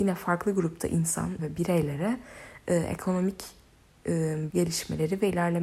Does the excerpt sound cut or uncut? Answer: cut